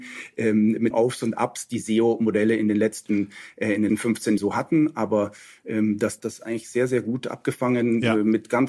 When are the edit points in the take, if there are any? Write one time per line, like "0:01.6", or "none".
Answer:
0:00.9
0:03.9
0:04.4
0:06.2